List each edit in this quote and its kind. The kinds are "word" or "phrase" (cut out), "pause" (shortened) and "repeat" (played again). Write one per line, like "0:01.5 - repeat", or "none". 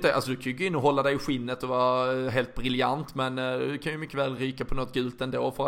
none